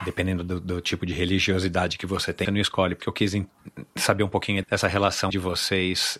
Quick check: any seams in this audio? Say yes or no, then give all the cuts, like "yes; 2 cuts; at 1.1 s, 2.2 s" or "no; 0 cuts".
yes; 4 cuts; at 2.4 s, 3.0 s, 4.6 s, 5.3 s